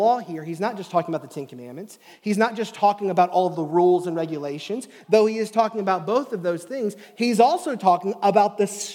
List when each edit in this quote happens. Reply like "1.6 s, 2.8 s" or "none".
none

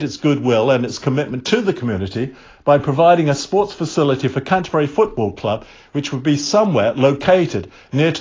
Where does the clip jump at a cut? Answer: none

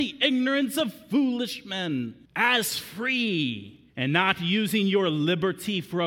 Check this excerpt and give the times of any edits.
2.2 s, 3.9 s

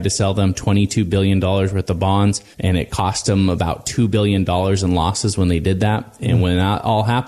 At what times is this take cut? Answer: 2.5 s

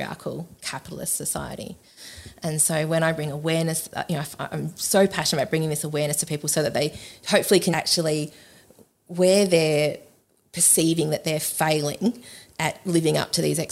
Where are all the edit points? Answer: 7.7 s

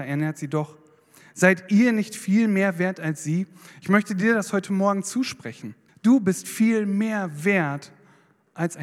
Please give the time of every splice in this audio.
5.9 s

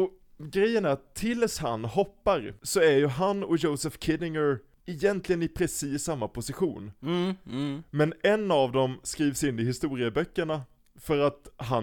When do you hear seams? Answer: none

